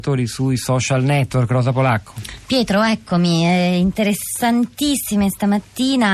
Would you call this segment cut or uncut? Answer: uncut